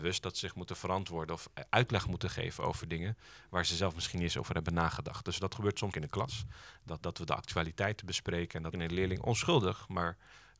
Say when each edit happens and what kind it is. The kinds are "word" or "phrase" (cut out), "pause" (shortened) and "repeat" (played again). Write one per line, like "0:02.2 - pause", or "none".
0:05.9 - word
0:07.0 - word
0:08.7 - word